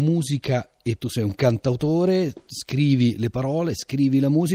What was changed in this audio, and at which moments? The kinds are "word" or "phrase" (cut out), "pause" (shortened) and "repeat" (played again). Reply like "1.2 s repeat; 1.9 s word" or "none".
1.0 s word